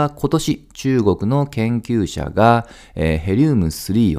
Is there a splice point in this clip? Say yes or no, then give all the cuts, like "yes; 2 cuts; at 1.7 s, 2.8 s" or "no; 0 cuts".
no; 0 cuts